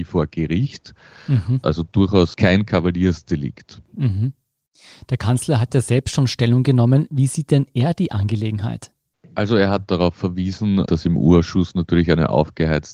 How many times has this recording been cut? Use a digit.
0